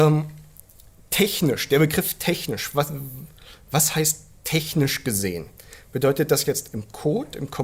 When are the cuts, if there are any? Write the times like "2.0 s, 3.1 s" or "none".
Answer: none